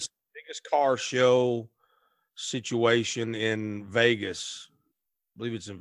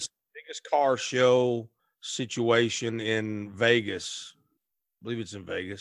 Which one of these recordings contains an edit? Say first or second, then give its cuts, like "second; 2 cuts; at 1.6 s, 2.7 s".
second; 1 cut; at 1.8 s